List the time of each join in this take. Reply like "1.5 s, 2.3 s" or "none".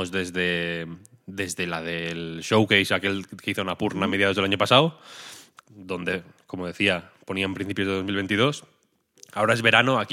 none